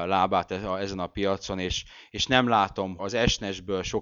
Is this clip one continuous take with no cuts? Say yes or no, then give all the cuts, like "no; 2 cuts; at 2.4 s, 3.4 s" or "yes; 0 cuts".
no; 1 cut; at 3.0 s